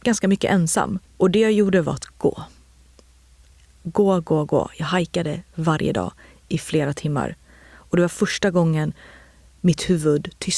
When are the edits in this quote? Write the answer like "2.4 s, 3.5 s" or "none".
1.1 s